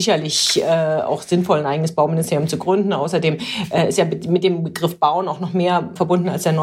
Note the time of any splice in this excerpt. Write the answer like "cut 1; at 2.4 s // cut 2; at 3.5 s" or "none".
none